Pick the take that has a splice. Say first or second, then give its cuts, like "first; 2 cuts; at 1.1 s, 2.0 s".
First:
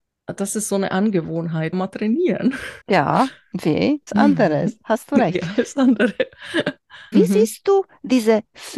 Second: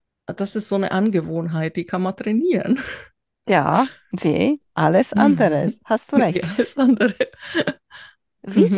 first; 4 cuts; at 1.7 s, 2.8 s, 4.1 s, 7.1 s